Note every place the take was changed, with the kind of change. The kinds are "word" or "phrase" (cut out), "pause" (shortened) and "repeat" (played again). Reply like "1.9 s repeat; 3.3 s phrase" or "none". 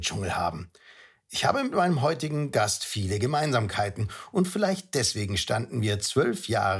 none